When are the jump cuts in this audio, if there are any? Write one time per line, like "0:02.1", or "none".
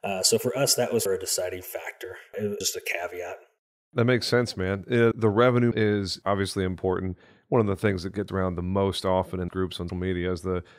0:01.1
0:02.6
0:05.1
0:05.7
0:08.3
0:09.5
0:09.9